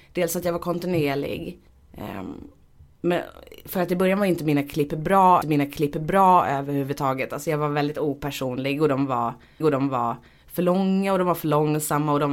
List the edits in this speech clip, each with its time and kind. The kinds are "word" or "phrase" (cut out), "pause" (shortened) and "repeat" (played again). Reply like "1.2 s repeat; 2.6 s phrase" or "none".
1.7 s pause; 5.4 s repeat; 9.6 s repeat